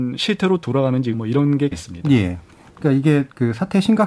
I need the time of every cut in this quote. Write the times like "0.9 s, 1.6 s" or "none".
1.1 s, 1.7 s